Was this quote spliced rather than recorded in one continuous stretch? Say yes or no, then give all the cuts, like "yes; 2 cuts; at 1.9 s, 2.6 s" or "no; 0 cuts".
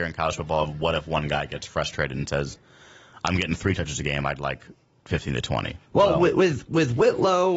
yes; 1 cut; at 5.9 s